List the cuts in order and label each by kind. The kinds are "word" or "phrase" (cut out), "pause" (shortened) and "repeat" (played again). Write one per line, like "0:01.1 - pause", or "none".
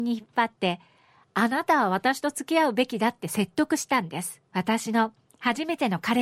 0:04.5 - pause